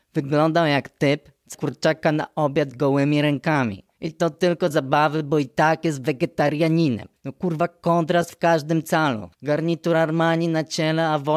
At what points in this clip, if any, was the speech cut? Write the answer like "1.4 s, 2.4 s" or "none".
1.5 s, 3.9 s, 4.7 s, 7.2 s, 9.3 s